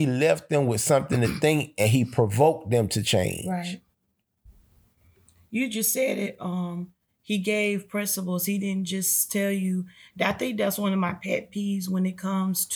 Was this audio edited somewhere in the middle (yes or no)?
no